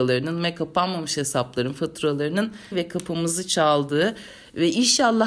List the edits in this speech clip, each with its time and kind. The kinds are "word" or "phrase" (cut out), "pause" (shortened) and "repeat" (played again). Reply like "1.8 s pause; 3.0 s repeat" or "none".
2.7 s word